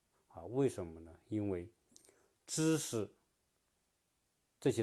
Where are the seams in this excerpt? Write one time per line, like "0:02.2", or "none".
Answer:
none